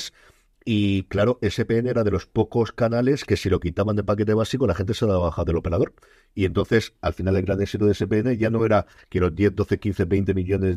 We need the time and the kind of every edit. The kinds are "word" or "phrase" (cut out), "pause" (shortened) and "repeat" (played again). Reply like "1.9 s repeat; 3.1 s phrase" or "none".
none